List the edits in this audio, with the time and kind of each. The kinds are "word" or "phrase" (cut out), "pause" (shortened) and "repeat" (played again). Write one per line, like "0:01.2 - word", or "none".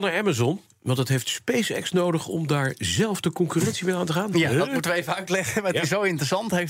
none